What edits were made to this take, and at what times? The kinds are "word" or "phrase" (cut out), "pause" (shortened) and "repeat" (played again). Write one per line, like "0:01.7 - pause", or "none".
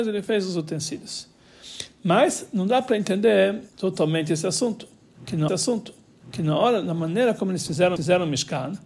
0:03.7 - pause
0:05.5 - repeat
0:08.0 - repeat

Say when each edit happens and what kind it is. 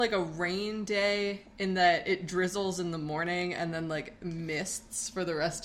none

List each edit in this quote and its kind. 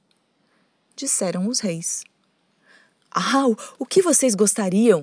none

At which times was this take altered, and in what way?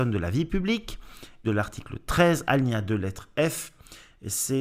0:01.4 - phrase

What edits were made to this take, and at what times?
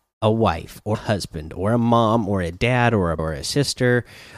0:00.9 - word
0:03.2 - word

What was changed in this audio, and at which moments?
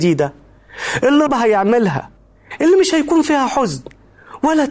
0:01.3 - word

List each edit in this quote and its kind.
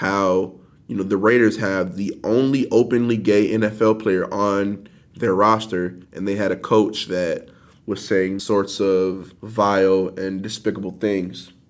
0:06.0 - pause
0:08.4 - word
0:09.4 - pause

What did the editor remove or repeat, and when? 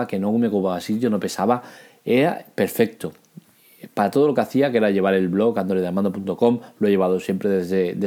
none

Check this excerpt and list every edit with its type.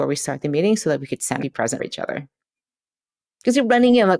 0:01.4 - word
0:01.8 - word

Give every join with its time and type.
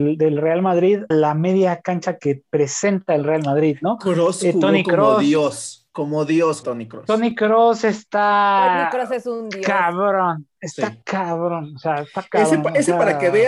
0:01.1 - word
0:06.6 - word
0:11.0 - pause

